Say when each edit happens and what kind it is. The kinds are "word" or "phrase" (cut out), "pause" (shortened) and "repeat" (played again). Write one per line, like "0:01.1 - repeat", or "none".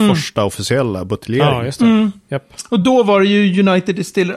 none